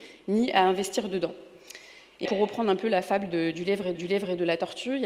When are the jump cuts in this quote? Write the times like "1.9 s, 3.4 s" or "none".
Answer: 2.2 s, 3.9 s